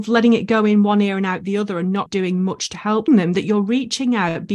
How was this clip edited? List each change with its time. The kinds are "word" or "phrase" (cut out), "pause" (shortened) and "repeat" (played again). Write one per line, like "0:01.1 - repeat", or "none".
0:02.1 - word
0:03.1 - phrase